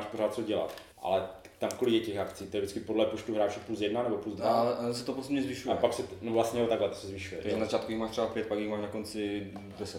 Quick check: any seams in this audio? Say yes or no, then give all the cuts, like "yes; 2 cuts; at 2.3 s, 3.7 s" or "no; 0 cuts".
yes; 1 cut; at 0.9 s